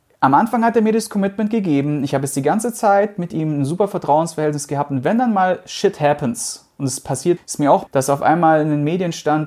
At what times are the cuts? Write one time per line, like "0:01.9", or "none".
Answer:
0:07.4
0:07.9